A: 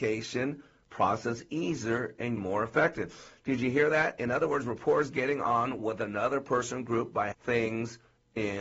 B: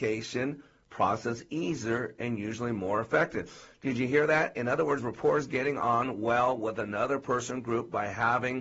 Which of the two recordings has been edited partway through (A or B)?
A